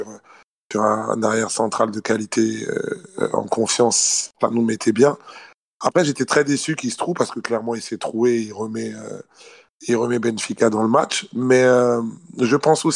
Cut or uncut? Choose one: uncut